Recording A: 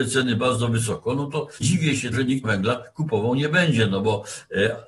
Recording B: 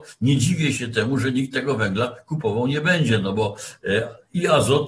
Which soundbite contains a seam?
A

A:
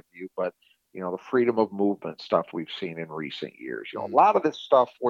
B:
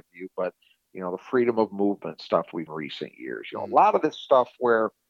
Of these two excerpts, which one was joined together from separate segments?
B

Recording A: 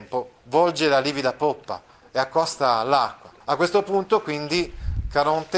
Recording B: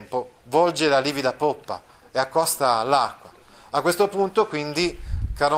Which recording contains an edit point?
A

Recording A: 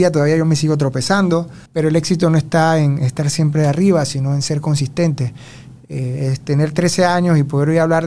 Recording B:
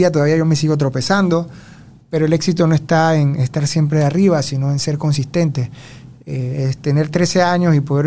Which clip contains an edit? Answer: A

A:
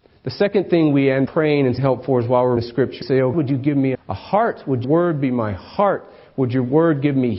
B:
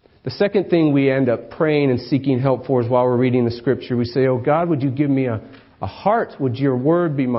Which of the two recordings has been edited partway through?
A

